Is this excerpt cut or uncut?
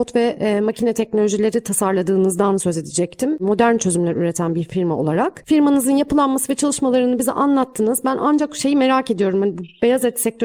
uncut